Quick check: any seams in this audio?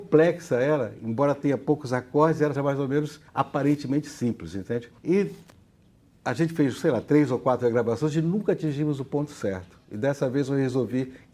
yes; 4 cuts; at 2.6 s, 3.3 s, 5.0 s, 9.8 s

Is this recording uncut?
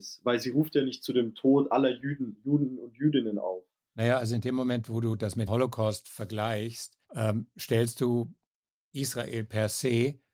no; 2 cuts; at 5.5 s, 7.0 s

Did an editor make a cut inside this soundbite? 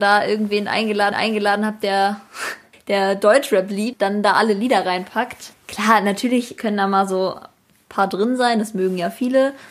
yes; 1 cut; at 1.1 s

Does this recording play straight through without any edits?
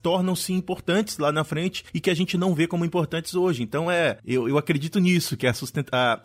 yes; 0 cuts

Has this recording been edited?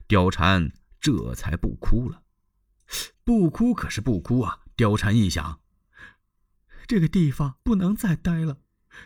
yes; 2 cuts; at 3.1 s, 7.6 s

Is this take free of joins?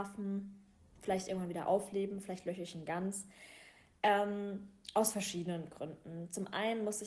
yes; 0 cuts

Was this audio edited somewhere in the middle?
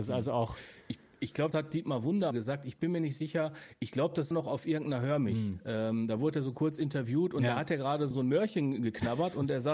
yes; 4 cuts; at 1.5 s, 2.3 s, 4.3 s, 8.1 s

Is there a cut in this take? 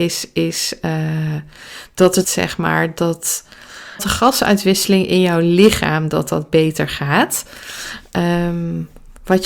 yes; 2 cuts; at 2.2 s, 4.0 s

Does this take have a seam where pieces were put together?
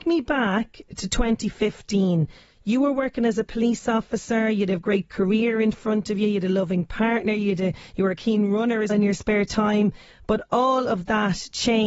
yes; 1 cut; at 8.9 s

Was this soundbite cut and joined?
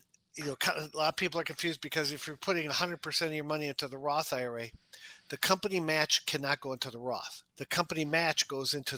yes; 1 cut; at 7.5 s

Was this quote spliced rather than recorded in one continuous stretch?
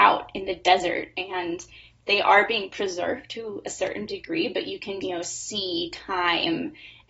yes; 1 cut; at 5.0 s

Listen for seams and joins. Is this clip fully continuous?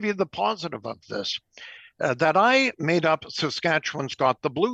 yes; 0 cuts

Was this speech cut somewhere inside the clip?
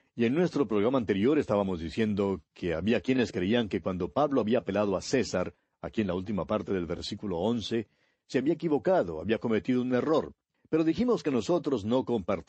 no; 0 cuts

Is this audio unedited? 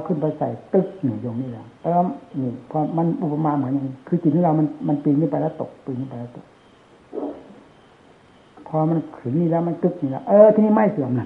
no; 3 cuts; at 1.8 s, 2.3 s, 4.0 s

